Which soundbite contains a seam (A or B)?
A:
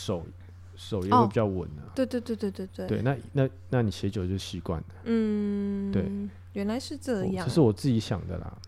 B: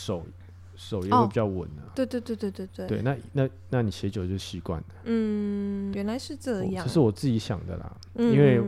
B